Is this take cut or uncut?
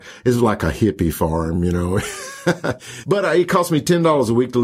uncut